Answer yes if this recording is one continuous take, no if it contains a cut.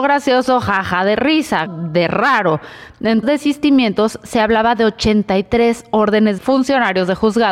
no